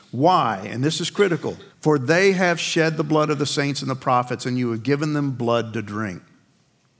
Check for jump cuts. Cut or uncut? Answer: cut